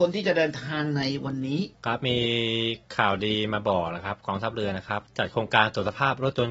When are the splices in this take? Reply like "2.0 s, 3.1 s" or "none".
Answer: 1.7 s, 2.9 s